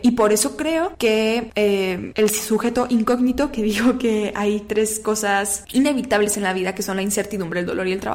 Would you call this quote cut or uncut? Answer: uncut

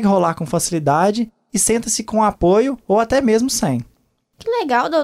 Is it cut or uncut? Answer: uncut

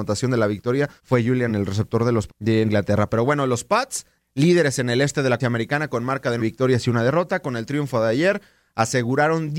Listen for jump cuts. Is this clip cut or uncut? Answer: cut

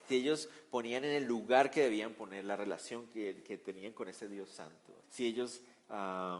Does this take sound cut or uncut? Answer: cut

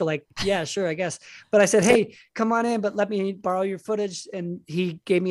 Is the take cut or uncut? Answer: uncut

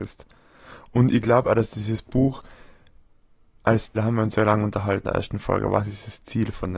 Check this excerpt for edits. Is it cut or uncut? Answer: cut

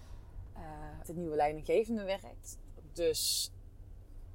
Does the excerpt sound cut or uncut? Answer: cut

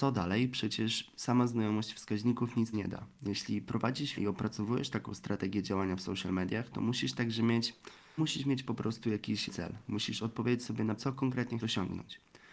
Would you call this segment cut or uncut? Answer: cut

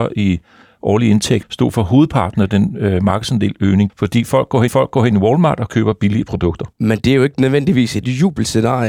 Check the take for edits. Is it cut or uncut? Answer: cut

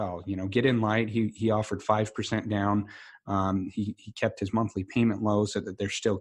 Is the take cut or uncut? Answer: uncut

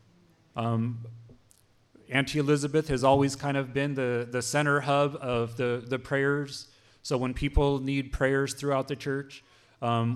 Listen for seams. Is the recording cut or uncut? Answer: uncut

